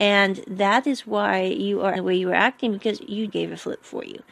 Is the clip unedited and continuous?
no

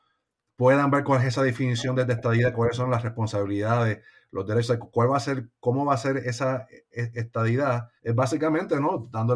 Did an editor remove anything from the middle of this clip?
yes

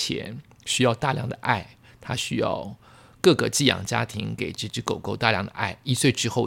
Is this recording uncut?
yes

